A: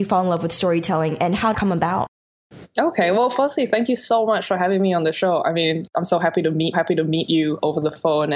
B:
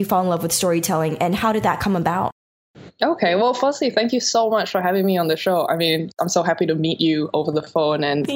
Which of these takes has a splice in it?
A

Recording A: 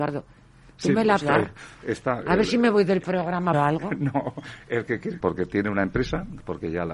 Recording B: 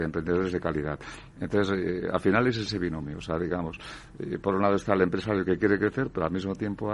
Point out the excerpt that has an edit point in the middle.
A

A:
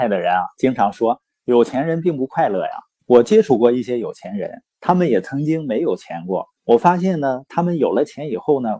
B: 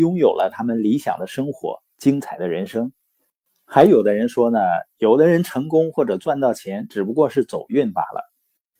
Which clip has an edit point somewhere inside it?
A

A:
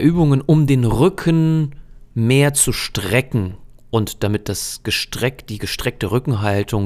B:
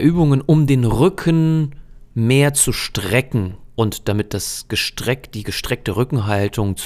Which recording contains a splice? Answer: B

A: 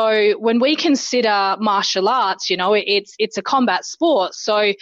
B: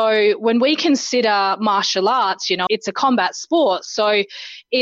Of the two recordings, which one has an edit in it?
B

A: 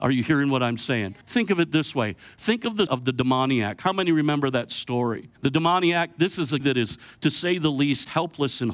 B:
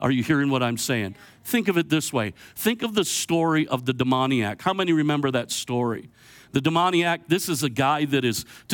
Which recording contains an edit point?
A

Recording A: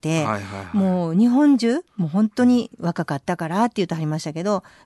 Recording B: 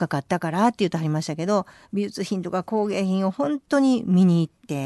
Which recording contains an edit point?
A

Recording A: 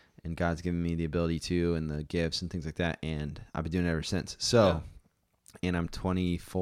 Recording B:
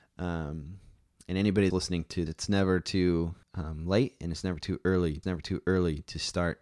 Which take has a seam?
B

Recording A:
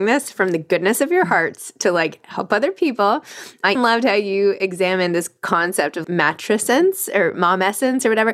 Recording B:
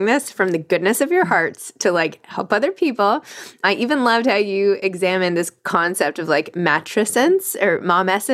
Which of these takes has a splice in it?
A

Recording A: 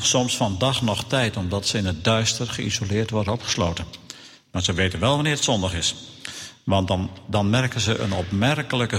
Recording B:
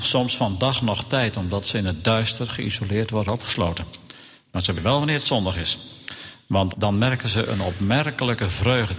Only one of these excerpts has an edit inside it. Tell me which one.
B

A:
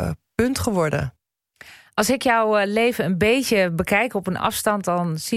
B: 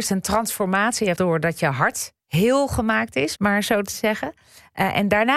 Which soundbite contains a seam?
B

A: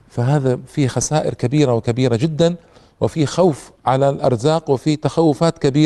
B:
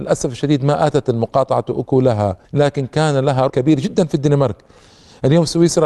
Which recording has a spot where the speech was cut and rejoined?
B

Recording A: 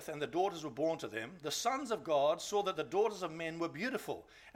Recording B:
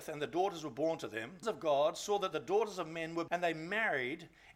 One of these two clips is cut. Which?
B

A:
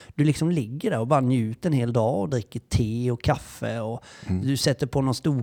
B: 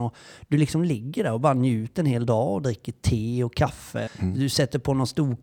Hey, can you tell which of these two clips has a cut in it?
B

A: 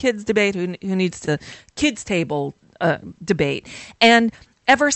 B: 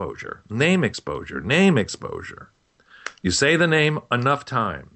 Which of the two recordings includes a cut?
A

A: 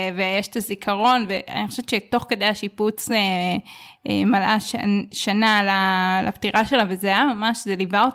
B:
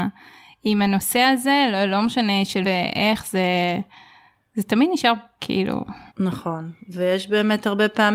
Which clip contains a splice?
B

